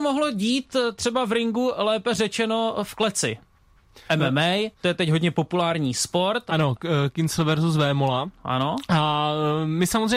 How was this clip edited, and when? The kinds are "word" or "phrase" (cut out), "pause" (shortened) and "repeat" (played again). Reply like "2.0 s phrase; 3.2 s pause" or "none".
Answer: 4.7 s pause

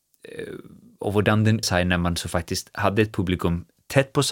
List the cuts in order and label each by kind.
1.6 s word

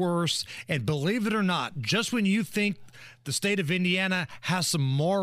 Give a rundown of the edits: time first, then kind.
none

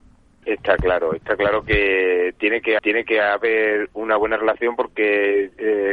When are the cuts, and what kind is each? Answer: 2.8 s repeat

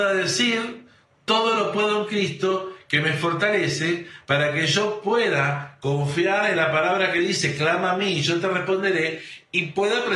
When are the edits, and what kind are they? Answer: none

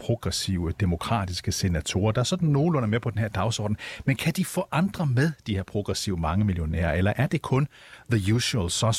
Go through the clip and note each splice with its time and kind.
none

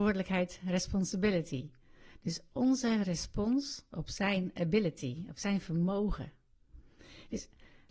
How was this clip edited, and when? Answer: none

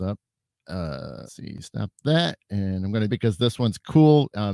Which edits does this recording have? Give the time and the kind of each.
1.3 s word; 3.1 s phrase

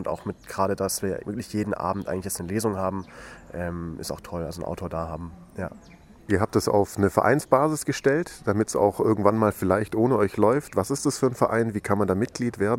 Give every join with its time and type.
1.2 s word

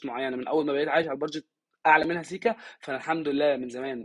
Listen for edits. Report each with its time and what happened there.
none

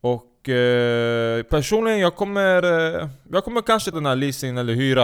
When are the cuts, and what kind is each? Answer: 3.9 s word

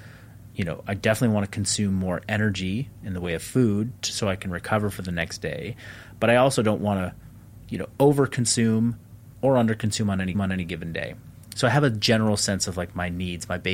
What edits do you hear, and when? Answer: 10.3 s repeat

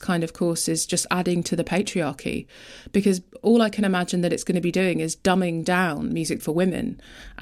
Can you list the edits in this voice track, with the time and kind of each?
6.4 s word

